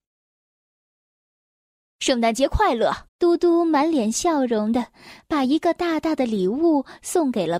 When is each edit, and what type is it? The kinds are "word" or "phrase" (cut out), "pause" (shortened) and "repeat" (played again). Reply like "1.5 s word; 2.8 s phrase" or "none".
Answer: 3.1 s pause